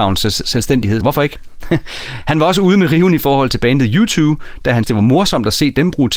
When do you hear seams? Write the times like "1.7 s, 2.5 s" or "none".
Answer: 1.0 s, 4.8 s